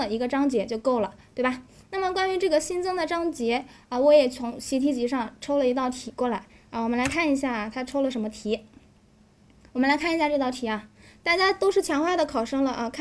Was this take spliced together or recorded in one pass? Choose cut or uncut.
uncut